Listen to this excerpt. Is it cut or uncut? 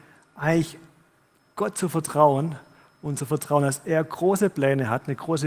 uncut